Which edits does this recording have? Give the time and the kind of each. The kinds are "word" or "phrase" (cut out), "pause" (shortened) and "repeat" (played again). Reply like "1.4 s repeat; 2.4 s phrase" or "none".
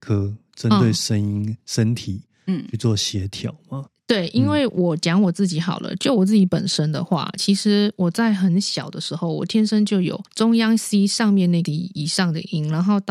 10.3 s pause; 11.7 s word